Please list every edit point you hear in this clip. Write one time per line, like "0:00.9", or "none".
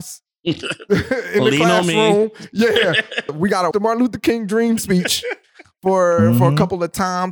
0:03.3
0:03.7